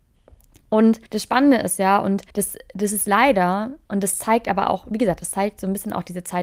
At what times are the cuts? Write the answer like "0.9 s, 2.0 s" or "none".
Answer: 1.1 s, 2.3 s